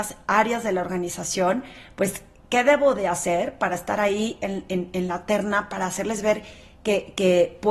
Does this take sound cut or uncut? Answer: uncut